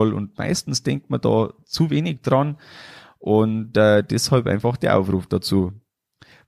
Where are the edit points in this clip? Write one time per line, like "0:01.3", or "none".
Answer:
none